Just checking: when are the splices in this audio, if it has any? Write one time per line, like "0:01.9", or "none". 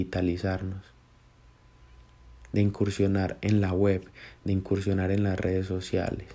none